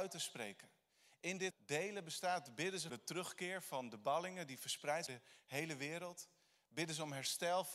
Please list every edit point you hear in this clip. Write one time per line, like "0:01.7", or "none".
0:01.5
0:02.9
0:05.1